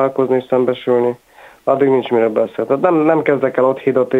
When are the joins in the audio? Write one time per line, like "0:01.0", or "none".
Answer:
none